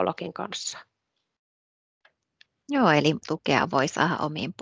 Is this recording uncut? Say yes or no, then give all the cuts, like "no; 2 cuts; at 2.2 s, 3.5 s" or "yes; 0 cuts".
no; 1 cut; at 3.2 s